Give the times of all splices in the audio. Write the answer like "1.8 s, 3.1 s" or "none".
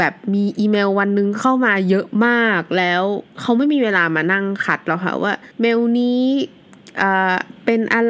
5.5 s